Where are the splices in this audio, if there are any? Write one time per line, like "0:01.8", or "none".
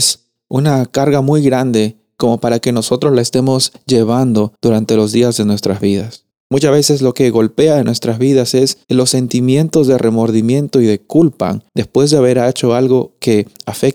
0:04.6
0:06.3
0:08.8
0:11.7